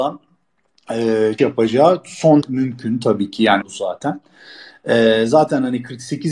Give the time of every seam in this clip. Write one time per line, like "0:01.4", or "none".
0:01.4
0:02.4
0:03.6